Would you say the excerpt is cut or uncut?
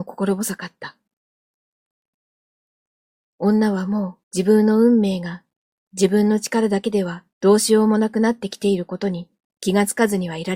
cut